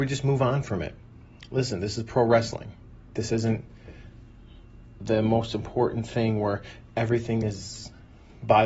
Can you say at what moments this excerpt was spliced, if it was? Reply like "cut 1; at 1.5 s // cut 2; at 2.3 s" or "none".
none

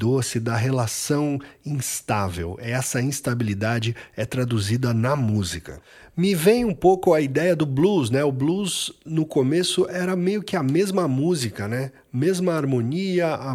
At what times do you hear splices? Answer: none

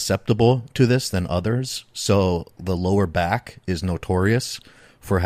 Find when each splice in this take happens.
cut 1; at 2.6 s

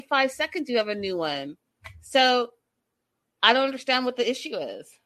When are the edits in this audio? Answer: none

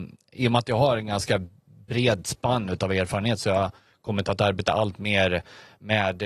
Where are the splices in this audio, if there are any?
none

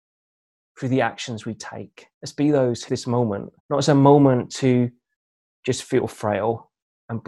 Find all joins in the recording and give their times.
cut 1; at 2.1 s // cut 2; at 2.9 s // cut 3; at 3.6 s

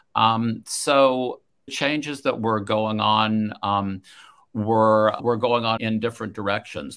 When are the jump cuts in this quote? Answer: cut 1; at 1.7 s // cut 2; at 5.2 s // cut 3; at 5.8 s

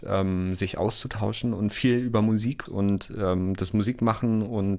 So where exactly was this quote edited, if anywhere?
cut 1; at 2.7 s

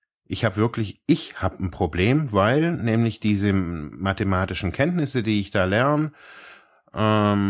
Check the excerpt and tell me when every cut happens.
none

